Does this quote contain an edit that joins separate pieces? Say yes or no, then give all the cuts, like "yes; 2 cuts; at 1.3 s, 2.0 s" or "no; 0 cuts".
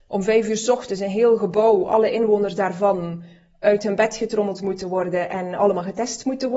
no; 0 cuts